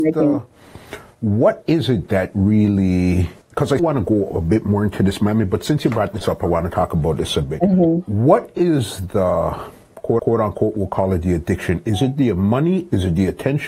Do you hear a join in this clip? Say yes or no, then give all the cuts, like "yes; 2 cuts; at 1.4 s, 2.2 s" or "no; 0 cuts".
yes; 3 cuts; at 3.4 s, 3.8 s, 10.2 s